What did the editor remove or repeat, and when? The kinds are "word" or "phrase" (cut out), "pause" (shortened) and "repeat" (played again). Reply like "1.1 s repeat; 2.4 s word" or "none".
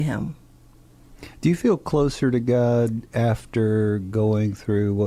none